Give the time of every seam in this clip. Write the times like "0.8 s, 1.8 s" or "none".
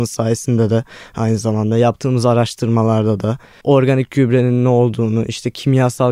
none

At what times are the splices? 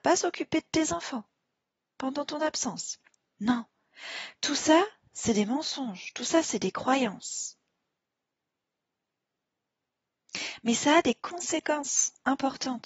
none

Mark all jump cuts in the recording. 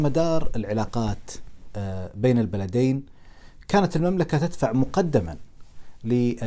none

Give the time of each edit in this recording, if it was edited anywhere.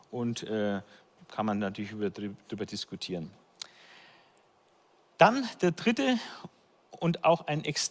none

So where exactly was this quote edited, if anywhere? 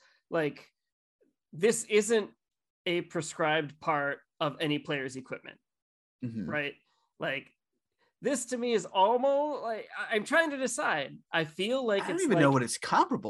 none

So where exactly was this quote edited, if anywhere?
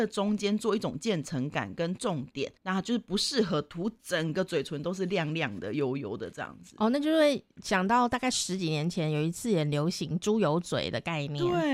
2.6 s

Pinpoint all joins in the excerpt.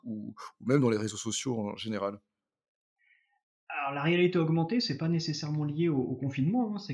none

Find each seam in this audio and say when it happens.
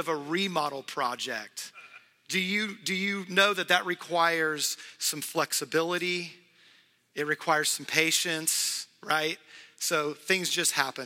none

